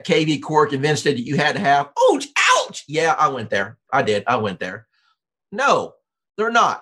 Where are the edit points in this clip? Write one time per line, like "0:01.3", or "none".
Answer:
none